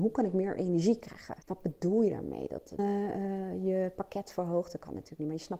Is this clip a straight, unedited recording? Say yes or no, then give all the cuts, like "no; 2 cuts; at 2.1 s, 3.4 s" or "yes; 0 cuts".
no; 2 cuts; at 1.4 s, 2.8 s